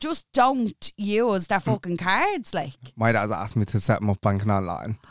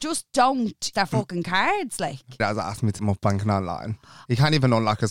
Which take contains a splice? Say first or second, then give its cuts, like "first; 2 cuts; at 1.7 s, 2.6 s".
second; 3 cuts; at 0.9 s, 2.4 s, 3.0 s